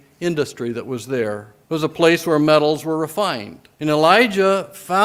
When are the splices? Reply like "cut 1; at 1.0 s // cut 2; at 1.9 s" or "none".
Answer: cut 1; at 1.6 s // cut 2; at 3.7 s